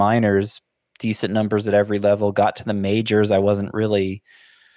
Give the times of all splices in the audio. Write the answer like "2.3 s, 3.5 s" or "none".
none